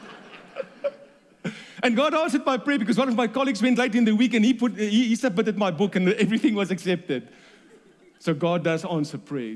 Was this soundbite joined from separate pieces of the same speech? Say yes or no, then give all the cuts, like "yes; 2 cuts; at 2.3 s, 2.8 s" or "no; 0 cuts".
no; 0 cuts